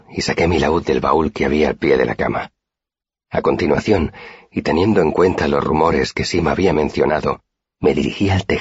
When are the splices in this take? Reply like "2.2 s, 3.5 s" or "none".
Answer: none